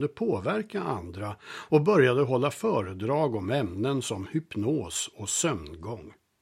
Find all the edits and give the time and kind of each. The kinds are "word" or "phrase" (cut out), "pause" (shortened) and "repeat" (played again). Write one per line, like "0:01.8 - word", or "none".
none